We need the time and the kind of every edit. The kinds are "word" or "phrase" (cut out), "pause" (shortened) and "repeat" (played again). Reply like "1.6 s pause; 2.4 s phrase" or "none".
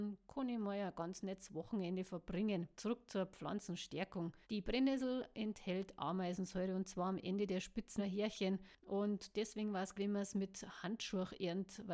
2.7 s pause; 4.4 s pause; 8.0 s word; 9.9 s word